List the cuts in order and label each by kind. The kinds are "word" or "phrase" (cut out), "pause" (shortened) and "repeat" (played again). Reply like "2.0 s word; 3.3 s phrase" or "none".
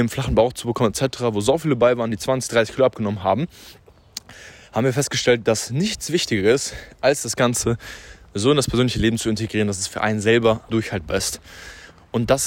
10.7 s word